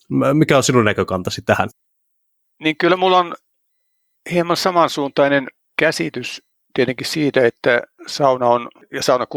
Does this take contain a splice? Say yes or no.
no